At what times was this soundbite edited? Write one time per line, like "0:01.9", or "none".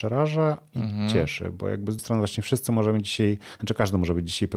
0:02.0